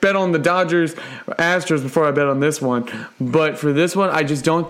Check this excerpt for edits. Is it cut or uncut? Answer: uncut